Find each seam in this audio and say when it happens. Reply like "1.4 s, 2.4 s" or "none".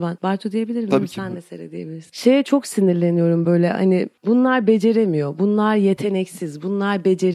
none